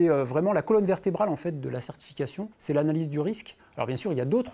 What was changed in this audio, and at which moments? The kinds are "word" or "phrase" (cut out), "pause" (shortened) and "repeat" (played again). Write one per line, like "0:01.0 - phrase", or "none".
0:02.5 - pause